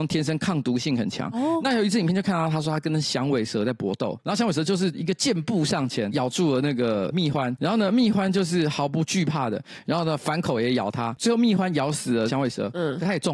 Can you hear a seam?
yes; 1 cut; at 4.2 s

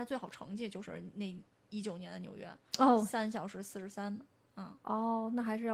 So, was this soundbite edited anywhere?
no; 0 cuts

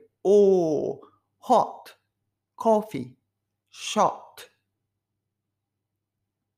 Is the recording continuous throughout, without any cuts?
yes; 0 cuts

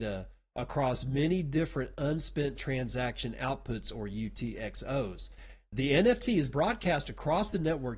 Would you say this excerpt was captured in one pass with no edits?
no; 1 cut; at 6.5 s

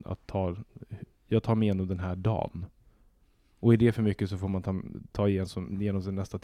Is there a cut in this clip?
no; 0 cuts

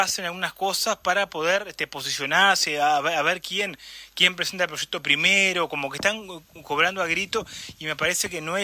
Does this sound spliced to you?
no; 0 cuts

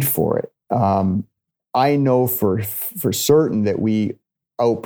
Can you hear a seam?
yes; 1 cut; at 1.4 s

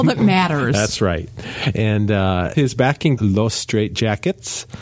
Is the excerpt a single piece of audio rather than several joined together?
no; 2 cuts; at 2.5 s, 3.2 s

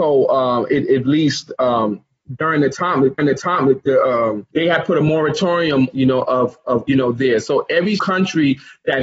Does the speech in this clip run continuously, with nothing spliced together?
no; 5 cuts; at 3.2 s, 4.5 s, 5.9 s, 6.9 s, 8.0 s

